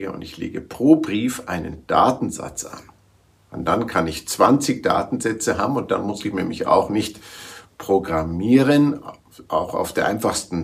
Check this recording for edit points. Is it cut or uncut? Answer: uncut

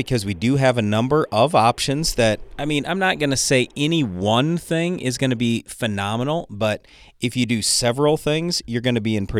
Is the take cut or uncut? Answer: uncut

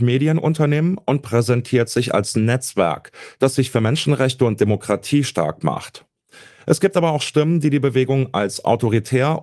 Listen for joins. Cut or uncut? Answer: uncut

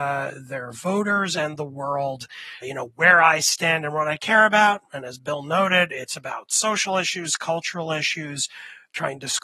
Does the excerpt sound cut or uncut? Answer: cut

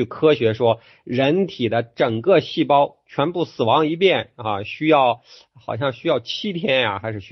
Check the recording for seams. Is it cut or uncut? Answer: uncut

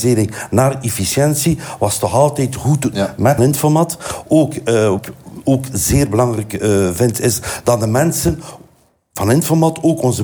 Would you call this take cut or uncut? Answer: cut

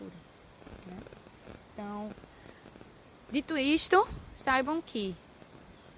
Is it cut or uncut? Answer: uncut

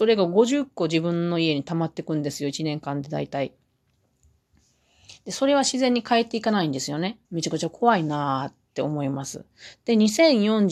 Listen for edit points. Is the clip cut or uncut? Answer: cut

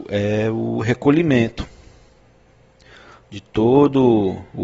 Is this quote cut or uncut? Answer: uncut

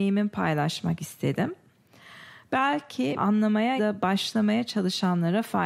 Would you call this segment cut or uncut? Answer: cut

